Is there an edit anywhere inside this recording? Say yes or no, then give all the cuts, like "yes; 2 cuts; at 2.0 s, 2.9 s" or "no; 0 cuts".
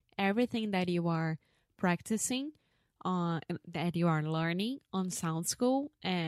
no; 0 cuts